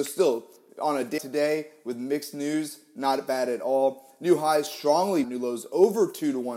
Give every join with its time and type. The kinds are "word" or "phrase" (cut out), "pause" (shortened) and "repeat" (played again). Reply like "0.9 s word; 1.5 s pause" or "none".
1.2 s word; 5.2 s phrase